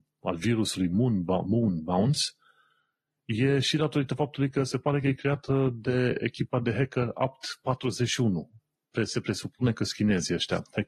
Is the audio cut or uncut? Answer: uncut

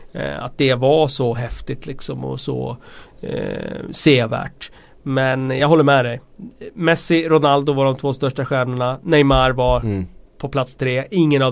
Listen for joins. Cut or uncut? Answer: uncut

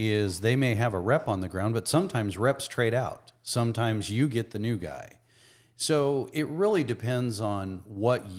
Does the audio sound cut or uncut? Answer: uncut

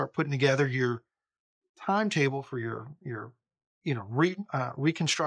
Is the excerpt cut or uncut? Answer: uncut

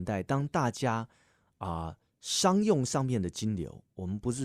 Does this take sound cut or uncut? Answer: uncut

